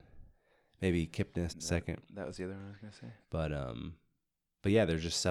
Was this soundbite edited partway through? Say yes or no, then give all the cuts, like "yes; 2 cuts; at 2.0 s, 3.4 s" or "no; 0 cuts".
yes; 2 cuts; at 1.5 s, 3.2 s